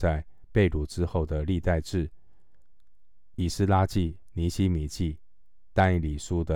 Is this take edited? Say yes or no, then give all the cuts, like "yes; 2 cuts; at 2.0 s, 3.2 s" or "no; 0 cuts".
no; 0 cuts